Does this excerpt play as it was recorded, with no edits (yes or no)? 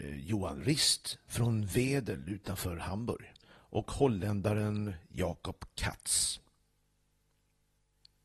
yes